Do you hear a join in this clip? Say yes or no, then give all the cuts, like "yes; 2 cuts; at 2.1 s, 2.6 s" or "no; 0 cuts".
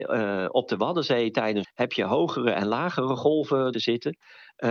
yes; 2 cuts; at 1.6 s, 3.7 s